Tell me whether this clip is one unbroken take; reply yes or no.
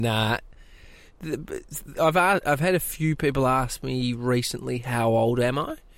yes